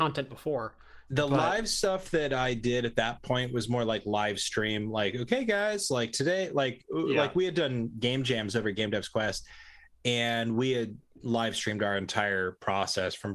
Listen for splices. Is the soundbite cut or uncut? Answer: uncut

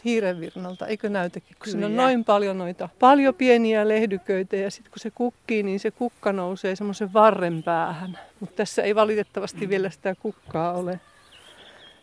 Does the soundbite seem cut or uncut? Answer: cut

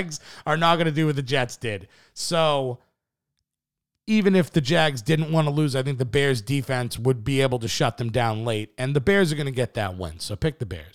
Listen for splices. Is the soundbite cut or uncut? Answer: uncut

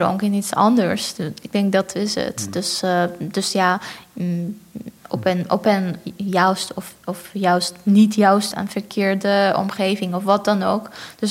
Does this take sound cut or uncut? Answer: cut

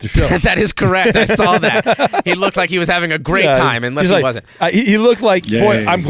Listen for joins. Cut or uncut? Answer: uncut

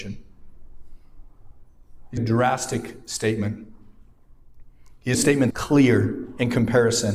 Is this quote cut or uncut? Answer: cut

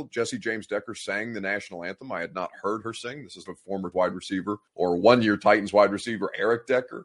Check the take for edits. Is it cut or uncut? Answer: cut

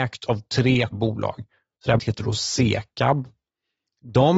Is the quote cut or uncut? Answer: cut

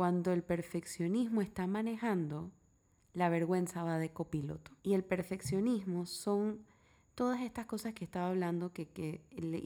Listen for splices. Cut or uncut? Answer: cut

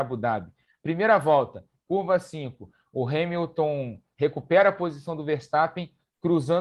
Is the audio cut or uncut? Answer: uncut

